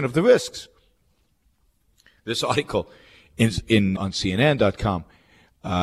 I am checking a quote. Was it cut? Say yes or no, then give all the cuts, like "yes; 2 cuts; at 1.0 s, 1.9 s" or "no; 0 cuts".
yes; 1 cut; at 3.9 s